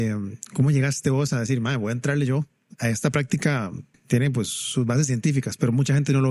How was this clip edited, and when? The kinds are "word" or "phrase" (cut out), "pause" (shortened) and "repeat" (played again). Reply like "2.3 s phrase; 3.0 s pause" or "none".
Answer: none